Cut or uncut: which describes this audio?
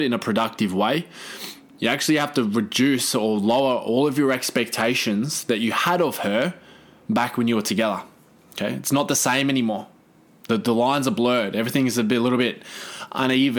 uncut